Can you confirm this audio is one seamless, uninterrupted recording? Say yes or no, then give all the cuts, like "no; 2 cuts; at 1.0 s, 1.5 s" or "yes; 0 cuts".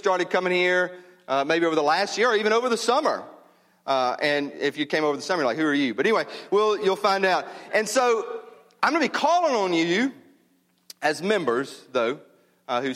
yes; 0 cuts